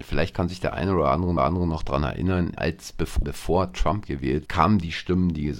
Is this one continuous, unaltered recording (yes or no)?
no